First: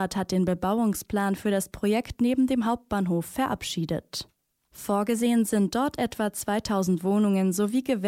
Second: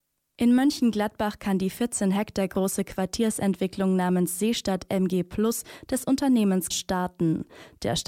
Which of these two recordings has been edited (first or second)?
second